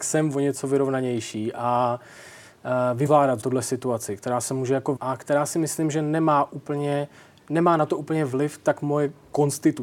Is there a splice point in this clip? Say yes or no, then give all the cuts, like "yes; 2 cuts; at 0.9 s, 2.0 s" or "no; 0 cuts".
yes; 3 cuts; at 3.1 s, 3.4 s, 5.0 s